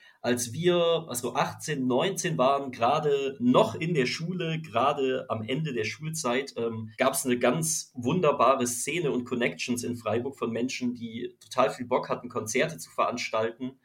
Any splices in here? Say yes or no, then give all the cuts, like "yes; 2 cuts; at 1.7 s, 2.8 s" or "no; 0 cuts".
yes; 2 cuts; at 1.2 s, 6.9 s